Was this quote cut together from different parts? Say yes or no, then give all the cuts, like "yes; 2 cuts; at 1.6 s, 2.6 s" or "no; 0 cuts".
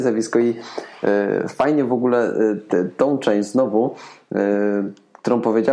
no; 0 cuts